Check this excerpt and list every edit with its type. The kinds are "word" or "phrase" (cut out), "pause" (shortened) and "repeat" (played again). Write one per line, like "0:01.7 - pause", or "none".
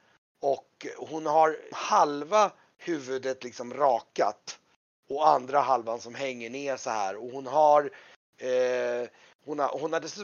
0:01.7 - word